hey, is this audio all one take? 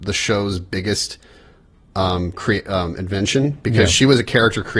yes; 0 cuts

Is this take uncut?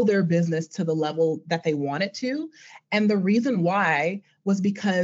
yes; 0 cuts

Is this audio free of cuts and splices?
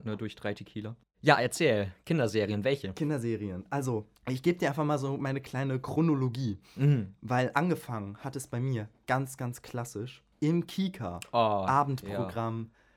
no; 3 cuts; at 1.0 s, 4.2 s, 10.3 s

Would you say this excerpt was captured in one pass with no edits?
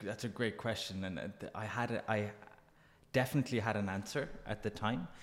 yes; 0 cuts

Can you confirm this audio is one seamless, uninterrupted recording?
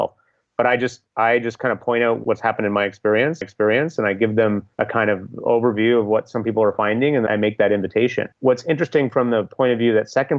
no; 3 cuts; at 3.4 s, 7.3 s, 8.3 s

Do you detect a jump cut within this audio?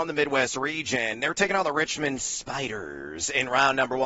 no; 0 cuts

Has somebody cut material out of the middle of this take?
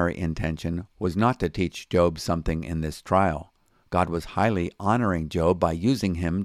no; 0 cuts

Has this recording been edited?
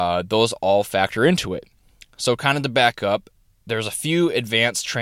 no; 0 cuts

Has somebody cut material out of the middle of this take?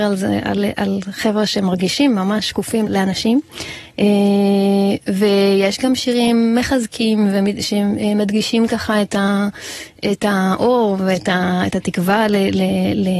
yes; 1 cut; at 2.9 s

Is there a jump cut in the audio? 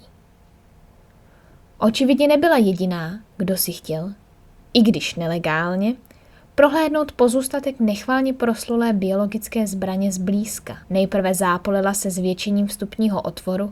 yes; 2 cuts; at 3.3 s, 10.8 s

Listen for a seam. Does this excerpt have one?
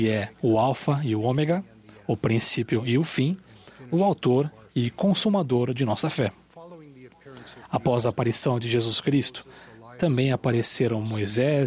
no; 0 cuts

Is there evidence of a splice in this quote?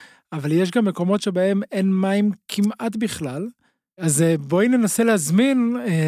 no; 0 cuts

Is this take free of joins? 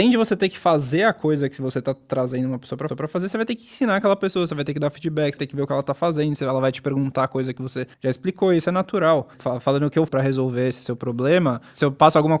no; 5 cuts; at 2.9 s, 5.4 s, 7.9 s, 9.3 s, 10.1 s

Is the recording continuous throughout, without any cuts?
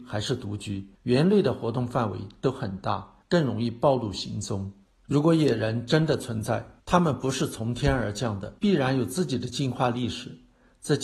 no; 5 cuts; at 0.9 s, 3.2 s, 4.8 s, 6.8 s, 8.6 s

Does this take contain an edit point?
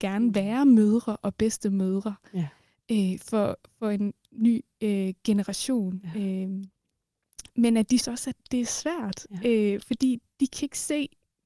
yes; 2 cuts; at 8.0 s, 8.4 s

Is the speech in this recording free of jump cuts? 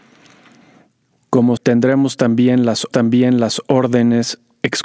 no; 2 cuts; at 1.6 s, 2.9 s

